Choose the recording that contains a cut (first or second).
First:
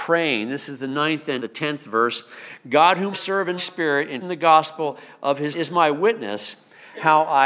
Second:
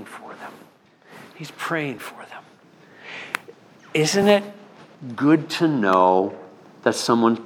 first